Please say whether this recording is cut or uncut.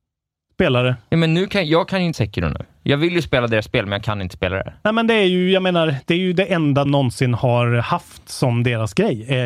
cut